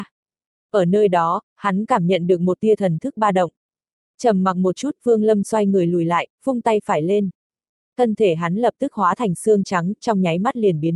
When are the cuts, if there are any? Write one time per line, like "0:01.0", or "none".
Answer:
none